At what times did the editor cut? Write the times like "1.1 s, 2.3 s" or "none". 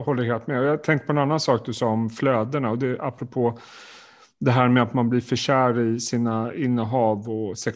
none